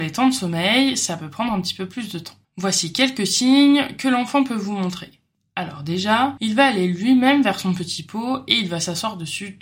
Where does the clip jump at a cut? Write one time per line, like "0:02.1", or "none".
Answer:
none